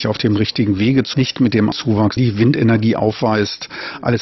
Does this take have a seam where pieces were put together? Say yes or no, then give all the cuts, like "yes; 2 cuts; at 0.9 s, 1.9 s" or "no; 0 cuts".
yes; 3 cuts; at 1.1 s, 1.7 s, 2.2 s